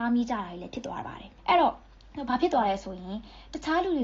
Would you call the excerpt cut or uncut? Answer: cut